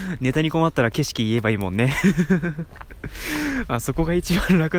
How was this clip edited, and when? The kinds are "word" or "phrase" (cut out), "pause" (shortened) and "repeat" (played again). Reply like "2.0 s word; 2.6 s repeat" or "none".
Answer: none